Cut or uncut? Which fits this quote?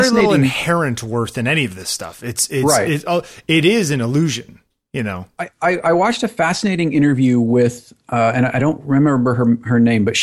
uncut